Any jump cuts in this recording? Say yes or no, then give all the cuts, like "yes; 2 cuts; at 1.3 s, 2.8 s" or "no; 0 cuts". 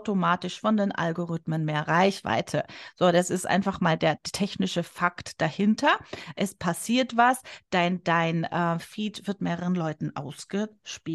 no; 0 cuts